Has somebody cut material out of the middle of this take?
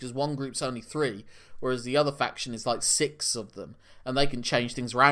no; 0 cuts

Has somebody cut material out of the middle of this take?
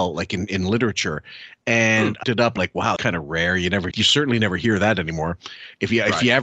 yes; 4 cuts; at 2.2 s, 2.6 s, 3.0 s, 3.9 s

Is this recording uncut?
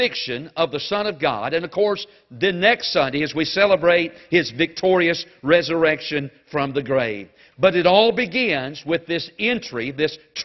yes; 0 cuts

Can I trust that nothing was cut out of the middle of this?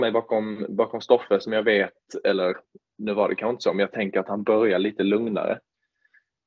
yes; 0 cuts

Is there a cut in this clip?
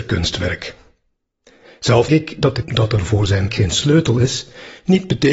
yes; 3 cuts; at 2.1 s, 2.6 s, 3.5 s

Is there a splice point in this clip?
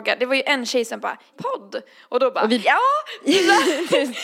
yes; 2 cuts; at 1.3 s, 2.6 s

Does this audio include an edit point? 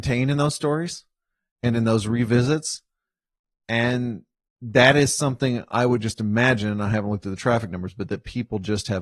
no; 0 cuts

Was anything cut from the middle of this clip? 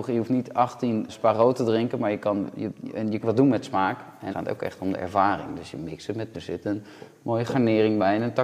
yes; 4 cuts; at 1.1 s, 3.2 s, 4.3 s, 6.3 s

